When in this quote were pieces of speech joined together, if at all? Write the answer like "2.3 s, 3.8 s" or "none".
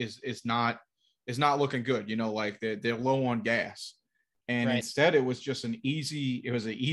none

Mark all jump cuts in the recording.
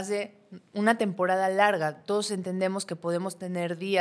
none

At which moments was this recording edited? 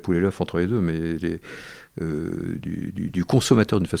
none

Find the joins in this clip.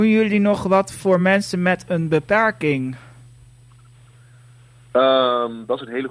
none

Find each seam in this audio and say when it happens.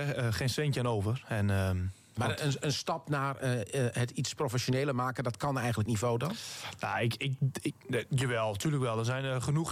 5.9 s

